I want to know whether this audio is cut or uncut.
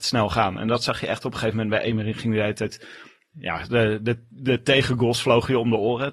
uncut